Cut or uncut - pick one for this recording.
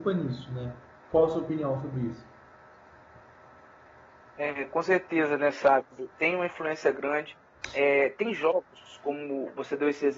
cut